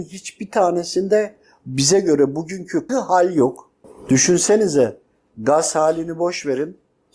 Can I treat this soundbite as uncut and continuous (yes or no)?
no